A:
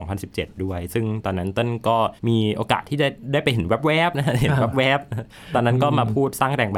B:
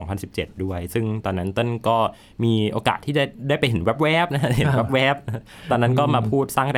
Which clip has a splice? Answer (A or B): A